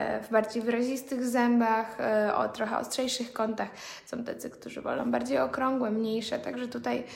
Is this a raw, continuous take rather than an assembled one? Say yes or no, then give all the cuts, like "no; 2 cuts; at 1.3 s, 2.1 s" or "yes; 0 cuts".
yes; 0 cuts